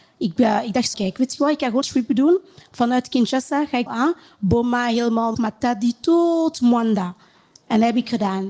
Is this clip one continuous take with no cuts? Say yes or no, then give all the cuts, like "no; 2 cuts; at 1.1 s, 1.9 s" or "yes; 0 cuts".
no; 4 cuts; at 0.9 s, 1.8 s, 3.9 s, 5.3 s